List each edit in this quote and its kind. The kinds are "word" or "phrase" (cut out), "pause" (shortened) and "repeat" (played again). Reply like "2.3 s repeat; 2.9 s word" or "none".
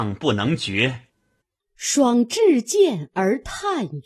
1.1 s pause